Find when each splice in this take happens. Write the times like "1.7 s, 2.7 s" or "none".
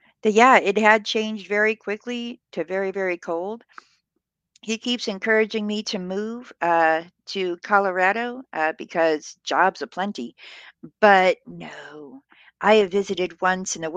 none